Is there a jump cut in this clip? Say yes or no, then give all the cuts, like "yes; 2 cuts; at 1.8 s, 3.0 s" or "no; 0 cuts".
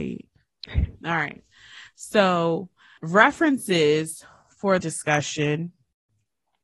yes; 2 cuts; at 3.0 s, 4.8 s